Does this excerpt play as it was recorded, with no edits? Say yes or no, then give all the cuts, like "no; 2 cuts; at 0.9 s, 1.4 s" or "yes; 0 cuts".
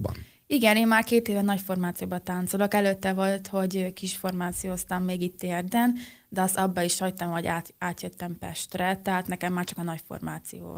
yes; 0 cuts